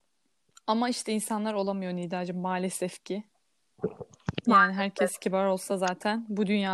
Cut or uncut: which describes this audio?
uncut